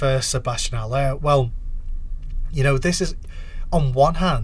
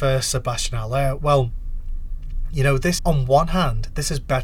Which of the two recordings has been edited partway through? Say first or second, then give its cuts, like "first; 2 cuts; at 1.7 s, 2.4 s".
second; 1 cut; at 3.0 s